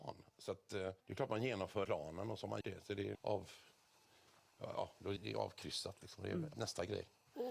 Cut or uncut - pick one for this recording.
cut